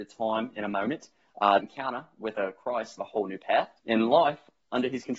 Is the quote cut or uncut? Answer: cut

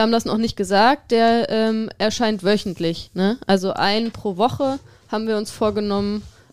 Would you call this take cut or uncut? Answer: cut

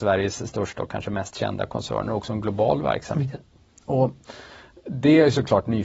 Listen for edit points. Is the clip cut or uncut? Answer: uncut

